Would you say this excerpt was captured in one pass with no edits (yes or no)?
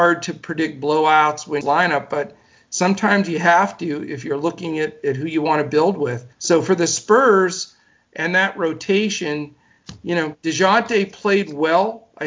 no